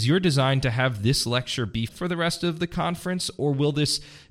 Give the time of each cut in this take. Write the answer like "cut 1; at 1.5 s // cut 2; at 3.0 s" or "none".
cut 1; at 1.9 s

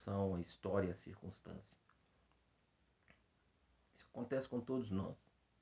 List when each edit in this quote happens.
none

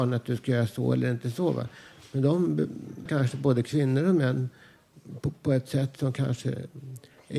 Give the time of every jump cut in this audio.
cut 1; at 3.1 s

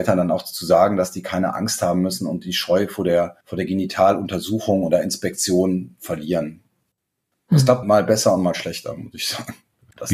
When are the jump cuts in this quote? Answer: cut 1; at 3.4 s // cut 2; at 7.8 s

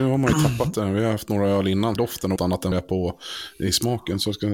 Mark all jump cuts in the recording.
cut 1; at 2.0 s // cut 2; at 2.4 s // cut 3; at 2.7 s

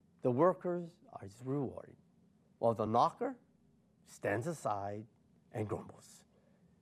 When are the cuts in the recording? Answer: none

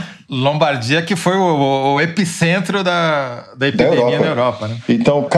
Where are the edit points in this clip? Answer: none

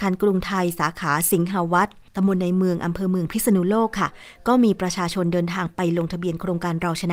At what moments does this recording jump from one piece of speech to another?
cut 1; at 2.1 s

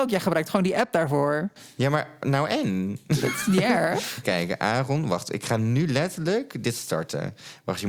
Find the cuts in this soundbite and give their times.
cut 1; at 4.2 s

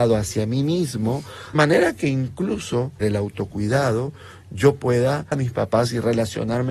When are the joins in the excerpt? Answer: cut 1; at 1.5 s // cut 2; at 3.0 s // cut 3; at 5.3 s

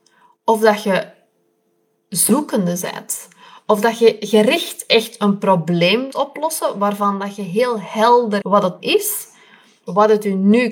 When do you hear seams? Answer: cut 1; at 6.1 s // cut 2; at 8.4 s // cut 3; at 8.8 s

